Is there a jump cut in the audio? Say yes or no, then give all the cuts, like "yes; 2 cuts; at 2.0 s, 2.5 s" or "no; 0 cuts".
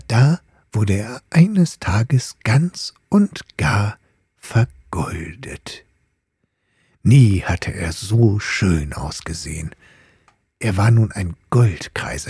no; 0 cuts